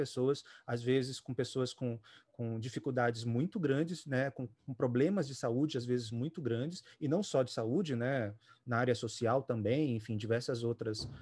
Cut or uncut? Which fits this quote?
uncut